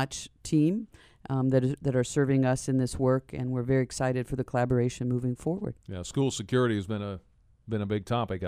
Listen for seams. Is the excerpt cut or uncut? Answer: uncut